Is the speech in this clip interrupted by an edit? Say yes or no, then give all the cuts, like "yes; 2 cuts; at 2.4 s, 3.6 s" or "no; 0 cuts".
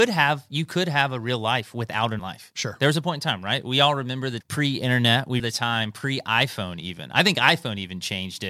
yes; 3 cuts; at 2.2 s, 4.4 s, 5.4 s